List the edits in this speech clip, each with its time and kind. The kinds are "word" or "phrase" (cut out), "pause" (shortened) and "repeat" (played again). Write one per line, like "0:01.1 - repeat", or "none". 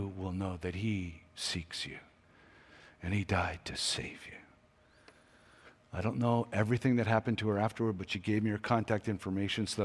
none